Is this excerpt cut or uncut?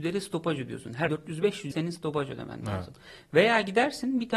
cut